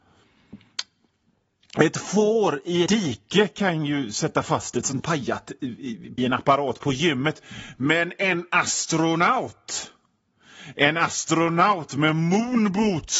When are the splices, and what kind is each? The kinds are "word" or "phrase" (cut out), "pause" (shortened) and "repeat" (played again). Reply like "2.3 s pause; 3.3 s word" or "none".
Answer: 2.9 s word; 5.0 s phrase; 6.2 s word